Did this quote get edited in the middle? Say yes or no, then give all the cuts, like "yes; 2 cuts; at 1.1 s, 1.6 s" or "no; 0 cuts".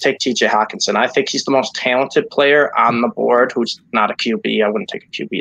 no; 0 cuts